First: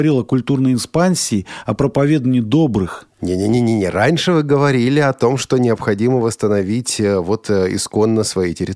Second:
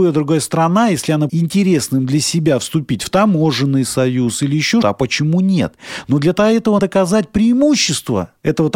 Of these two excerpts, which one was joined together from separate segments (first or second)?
second